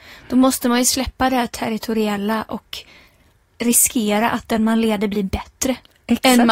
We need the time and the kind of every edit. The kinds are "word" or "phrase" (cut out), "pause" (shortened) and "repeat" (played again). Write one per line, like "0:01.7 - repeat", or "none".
none